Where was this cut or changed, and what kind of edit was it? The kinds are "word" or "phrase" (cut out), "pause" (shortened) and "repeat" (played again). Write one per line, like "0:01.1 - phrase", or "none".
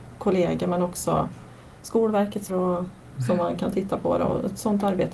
0:02.5 - word